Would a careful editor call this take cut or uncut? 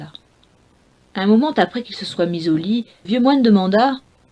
cut